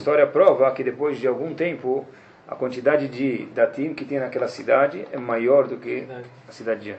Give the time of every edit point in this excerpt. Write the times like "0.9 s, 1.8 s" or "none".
none